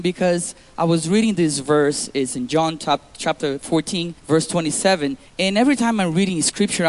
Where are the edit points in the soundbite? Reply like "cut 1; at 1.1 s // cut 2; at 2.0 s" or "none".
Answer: cut 1; at 4.2 s // cut 2; at 5.3 s